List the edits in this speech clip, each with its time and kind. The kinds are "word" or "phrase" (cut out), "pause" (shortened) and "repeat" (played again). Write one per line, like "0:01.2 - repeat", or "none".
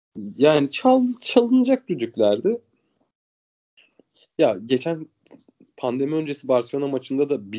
none